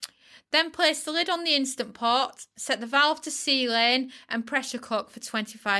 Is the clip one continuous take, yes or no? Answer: yes